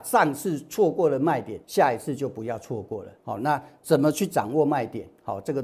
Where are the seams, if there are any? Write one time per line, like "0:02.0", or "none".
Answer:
0:01.6
0:03.2